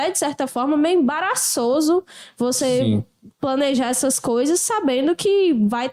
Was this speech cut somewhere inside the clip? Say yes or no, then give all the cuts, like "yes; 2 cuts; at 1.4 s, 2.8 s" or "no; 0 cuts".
no; 0 cuts